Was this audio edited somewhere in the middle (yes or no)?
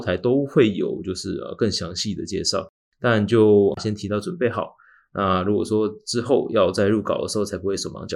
no